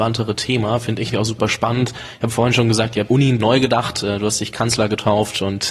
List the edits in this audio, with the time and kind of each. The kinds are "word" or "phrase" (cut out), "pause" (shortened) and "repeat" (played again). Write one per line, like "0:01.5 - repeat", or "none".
0:01.1 - word
0:03.1 - word
0:03.4 - word